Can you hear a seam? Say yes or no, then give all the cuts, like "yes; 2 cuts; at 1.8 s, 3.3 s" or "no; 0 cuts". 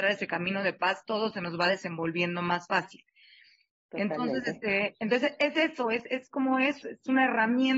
yes; 1 cut; at 6.8 s